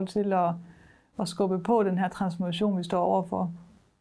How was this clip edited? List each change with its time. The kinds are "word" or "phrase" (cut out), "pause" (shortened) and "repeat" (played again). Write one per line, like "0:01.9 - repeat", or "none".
none